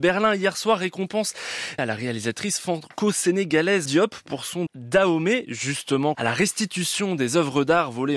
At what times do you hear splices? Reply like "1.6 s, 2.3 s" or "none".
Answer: 1.8 s, 3.9 s, 4.7 s, 6.1 s